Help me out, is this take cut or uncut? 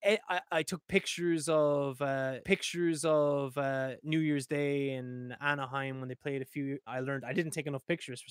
cut